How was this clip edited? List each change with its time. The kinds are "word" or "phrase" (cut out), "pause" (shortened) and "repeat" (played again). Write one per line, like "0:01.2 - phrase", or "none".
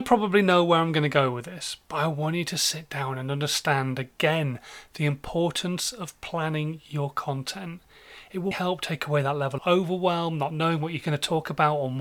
0:08.5 - word
0:09.6 - word